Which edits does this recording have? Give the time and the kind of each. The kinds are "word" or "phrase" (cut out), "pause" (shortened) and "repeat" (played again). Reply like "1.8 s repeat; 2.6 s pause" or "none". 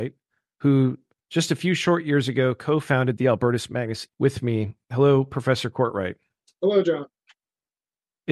4.1 s word